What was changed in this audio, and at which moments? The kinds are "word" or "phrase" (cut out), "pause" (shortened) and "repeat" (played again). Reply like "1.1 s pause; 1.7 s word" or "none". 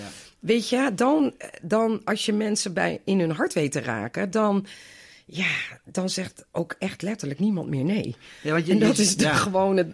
none